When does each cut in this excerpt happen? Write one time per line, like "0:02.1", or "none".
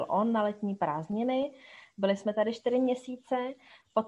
none